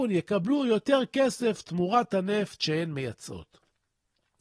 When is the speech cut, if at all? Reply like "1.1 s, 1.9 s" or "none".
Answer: none